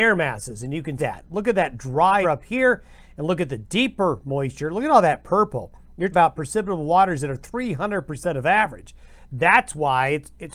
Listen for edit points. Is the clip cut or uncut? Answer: cut